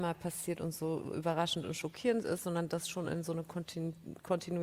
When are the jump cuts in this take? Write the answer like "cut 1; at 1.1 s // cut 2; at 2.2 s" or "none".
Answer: none